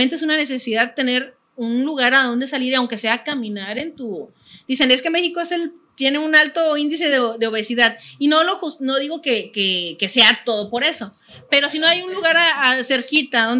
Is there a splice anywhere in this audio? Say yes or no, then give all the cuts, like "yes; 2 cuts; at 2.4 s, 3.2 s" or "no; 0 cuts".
no; 0 cuts